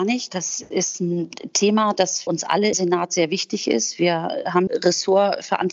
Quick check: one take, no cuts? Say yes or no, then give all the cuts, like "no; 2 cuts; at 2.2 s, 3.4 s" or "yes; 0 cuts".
no; 3 cuts; at 2.3 s, 2.7 s, 4.7 s